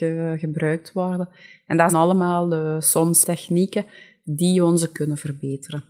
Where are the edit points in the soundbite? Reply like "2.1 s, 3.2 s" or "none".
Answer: 1.9 s, 3.2 s, 4.9 s